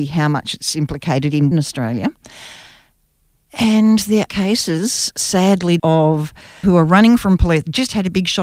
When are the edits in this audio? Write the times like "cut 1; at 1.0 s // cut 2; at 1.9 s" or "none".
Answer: cut 1; at 1.5 s // cut 2; at 4.3 s // cut 3; at 5.8 s // cut 4; at 6.6 s